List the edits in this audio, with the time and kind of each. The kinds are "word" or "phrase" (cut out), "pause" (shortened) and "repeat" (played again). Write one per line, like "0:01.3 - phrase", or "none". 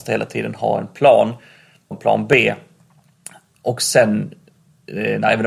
0:01.9 - word